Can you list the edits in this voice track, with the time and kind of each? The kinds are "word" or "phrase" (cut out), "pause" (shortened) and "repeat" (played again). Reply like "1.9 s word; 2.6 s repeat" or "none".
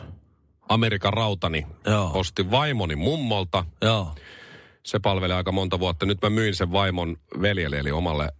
none